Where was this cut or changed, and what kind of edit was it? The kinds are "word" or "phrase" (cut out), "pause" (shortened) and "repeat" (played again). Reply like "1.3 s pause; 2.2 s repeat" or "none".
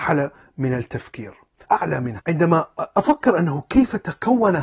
1.6 s phrase; 2.2 s phrase